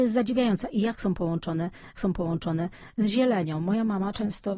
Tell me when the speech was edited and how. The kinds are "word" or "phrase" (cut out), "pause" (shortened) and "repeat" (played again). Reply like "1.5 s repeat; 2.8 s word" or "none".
2.0 s repeat